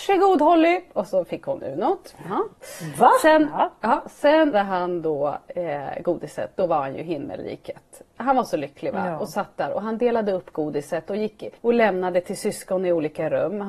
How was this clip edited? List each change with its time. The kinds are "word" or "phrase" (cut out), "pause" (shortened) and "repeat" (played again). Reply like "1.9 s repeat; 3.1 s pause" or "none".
4.5 s word; 6.6 s word; 11.6 s pause